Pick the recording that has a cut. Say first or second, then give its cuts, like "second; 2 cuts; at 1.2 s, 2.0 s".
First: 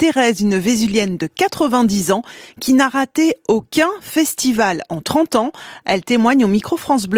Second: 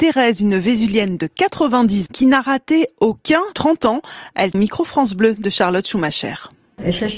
second; 3 cuts; at 2.1 s, 3.5 s, 4.5 s